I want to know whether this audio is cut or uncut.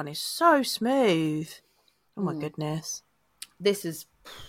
uncut